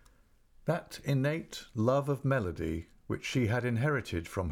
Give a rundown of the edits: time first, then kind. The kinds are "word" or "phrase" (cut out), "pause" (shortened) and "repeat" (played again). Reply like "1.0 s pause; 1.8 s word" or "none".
none